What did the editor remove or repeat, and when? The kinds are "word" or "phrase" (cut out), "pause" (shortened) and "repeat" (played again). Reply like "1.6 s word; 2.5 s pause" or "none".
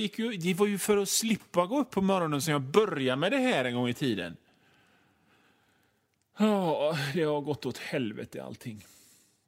none